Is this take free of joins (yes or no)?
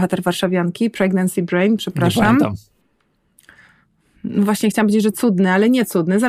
yes